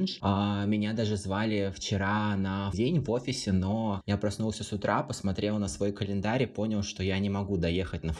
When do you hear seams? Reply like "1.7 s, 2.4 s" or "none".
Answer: 2.7 s